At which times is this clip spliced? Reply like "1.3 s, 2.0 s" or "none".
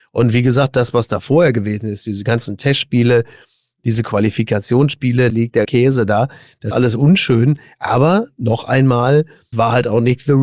5.3 s, 5.6 s, 6.7 s, 9.5 s

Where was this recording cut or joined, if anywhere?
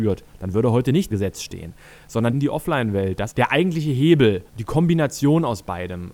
1.1 s, 2.3 s, 3.3 s, 4.5 s

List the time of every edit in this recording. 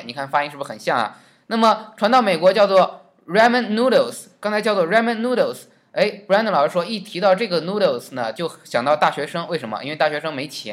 none

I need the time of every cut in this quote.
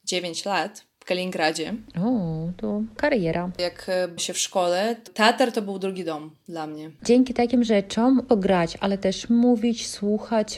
4.2 s, 8.3 s

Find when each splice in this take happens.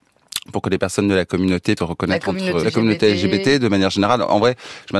1.8 s, 2.6 s

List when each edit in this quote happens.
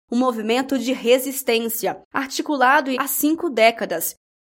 2.0 s, 3.0 s

